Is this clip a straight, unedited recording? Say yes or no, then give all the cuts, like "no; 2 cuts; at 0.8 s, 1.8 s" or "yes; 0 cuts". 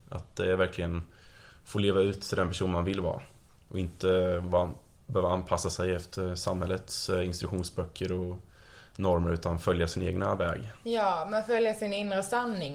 yes; 0 cuts